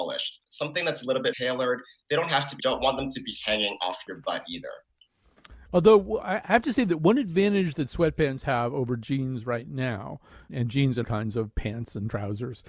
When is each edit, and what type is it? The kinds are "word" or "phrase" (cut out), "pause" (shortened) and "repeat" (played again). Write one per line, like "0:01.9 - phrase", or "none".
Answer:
0:01.3 - word
0:02.6 - phrase
0:10.5 - word
0:11.0 - word
0:11.5 - word